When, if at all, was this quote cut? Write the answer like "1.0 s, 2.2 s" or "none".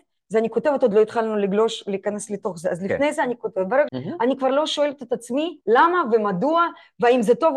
0.9 s, 3.9 s, 5.6 s